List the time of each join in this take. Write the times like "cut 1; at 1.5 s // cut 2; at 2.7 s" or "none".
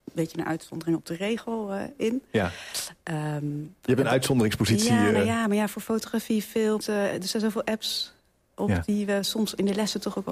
cut 1; at 6.8 s

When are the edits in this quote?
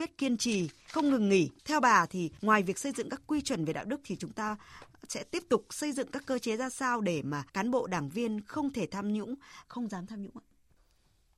cut 1; at 1.6 s // cut 2; at 7.5 s // cut 3; at 9.7 s

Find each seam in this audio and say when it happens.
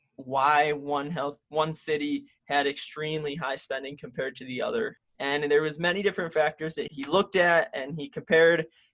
cut 1; at 6.9 s

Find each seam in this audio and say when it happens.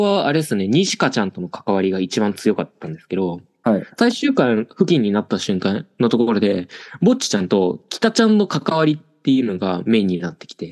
none

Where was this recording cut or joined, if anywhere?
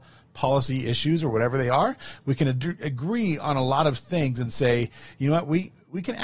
none

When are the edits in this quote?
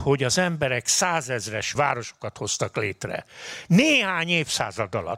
cut 1; at 1.8 s

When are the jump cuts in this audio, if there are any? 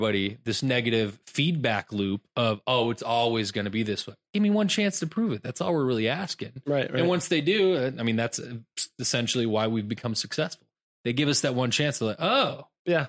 none

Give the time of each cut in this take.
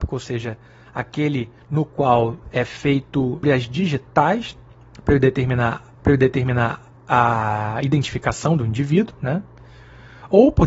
cut 1; at 3.4 s // cut 2; at 6.0 s

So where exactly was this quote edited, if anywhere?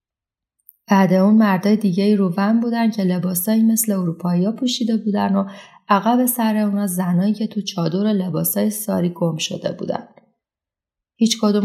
none

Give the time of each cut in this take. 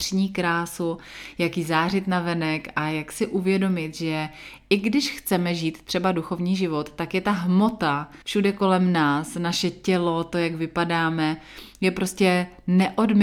cut 1; at 8.2 s

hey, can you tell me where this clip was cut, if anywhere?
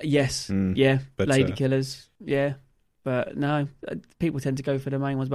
none

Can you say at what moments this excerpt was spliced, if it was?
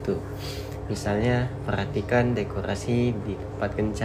none

